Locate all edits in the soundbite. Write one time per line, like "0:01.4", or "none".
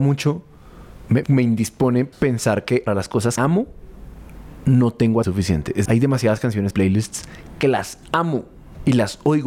0:01.2
0:02.1
0:02.9
0:03.4
0:05.2
0:05.9
0:06.7

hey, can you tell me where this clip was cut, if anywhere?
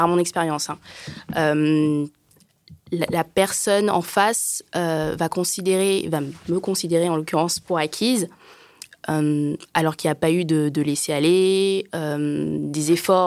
none

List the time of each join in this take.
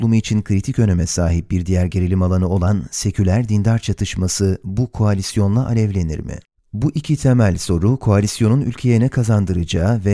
0:06.4

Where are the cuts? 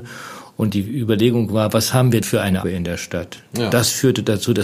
0:02.2
0:02.6

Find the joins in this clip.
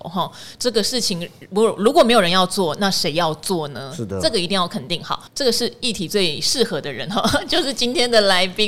0:05.3

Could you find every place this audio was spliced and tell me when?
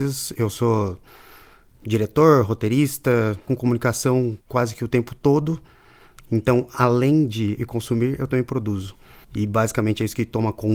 0:03.5
0:04.4
0:07.6
0:09.2

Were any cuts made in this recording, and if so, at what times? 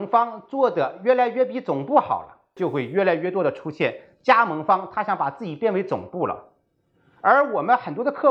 none

